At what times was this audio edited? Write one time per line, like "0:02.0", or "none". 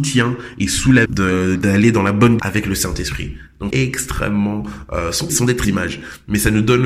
0:01.1
0:01.6
0:02.4
0:03.7
0:05.3
0:05.6